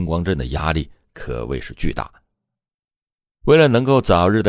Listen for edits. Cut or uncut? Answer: uncut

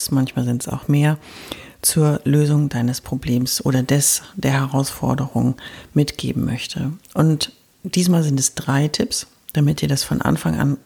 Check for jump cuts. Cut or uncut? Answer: cut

